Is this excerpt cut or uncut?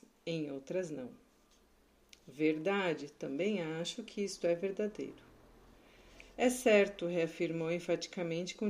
uncut